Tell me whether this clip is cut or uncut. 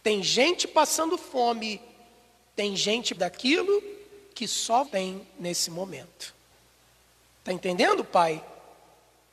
cut